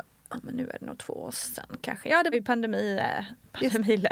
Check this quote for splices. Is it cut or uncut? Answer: cut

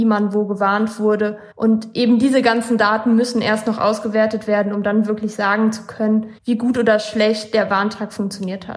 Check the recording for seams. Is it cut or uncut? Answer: cut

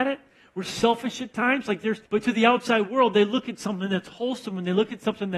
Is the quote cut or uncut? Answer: cut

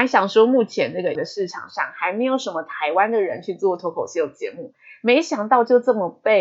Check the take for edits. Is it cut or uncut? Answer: cut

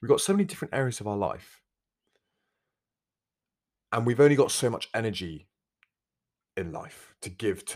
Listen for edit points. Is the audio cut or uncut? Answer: uncut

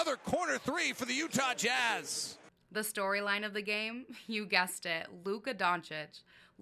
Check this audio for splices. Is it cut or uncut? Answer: uncut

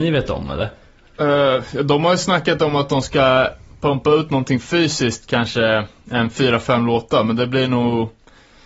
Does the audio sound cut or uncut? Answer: uncut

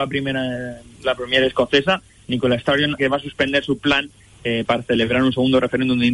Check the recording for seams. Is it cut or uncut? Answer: cut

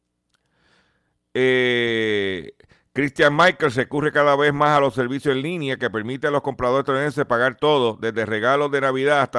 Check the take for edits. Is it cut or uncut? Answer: uncut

